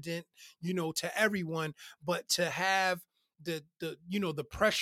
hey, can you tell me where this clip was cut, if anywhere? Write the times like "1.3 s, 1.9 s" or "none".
none